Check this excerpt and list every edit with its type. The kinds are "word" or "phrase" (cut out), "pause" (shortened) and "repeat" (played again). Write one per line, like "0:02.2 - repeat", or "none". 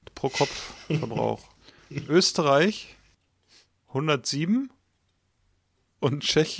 0:01.5 - pause